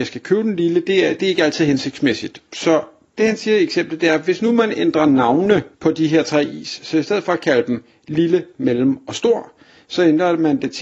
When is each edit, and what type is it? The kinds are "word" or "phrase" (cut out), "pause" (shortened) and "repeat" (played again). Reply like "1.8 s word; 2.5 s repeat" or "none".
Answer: 5.7 s pause